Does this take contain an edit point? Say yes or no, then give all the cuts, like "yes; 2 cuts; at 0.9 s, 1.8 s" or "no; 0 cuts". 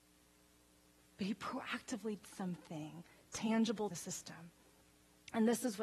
yes; 2 cuts; at 2.2 s, 3.9 s